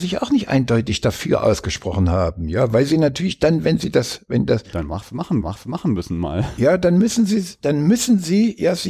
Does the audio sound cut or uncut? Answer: cut